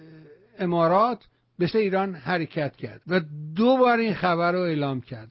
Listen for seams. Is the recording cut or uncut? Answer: cut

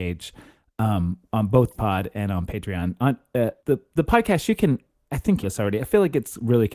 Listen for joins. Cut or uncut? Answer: cut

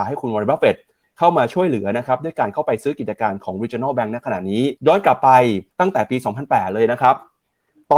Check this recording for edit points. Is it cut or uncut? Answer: cut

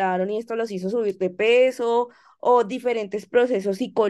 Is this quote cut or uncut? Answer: uncut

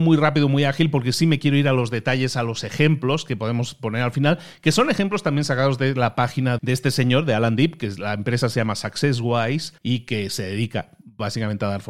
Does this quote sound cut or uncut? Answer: cut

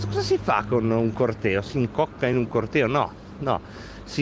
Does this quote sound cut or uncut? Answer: uncut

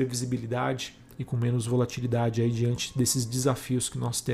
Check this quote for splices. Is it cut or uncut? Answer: uncut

